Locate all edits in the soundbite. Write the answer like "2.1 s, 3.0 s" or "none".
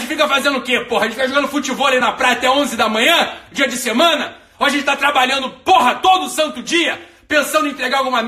none